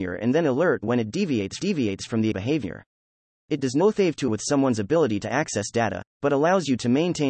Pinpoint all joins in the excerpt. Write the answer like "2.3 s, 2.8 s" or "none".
1.6 s, 2.3 s, 4.3 s, 6.1 s